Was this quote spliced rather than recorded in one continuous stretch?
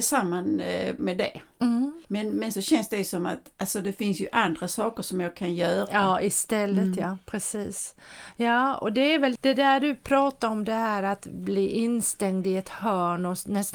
yes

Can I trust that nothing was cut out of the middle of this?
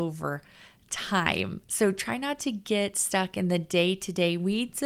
yes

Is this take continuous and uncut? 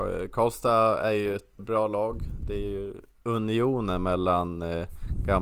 no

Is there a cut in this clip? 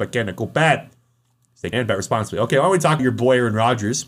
yes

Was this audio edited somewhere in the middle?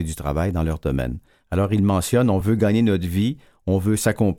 no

